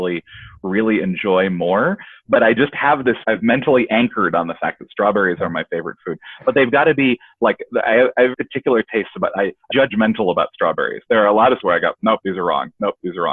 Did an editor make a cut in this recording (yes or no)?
yes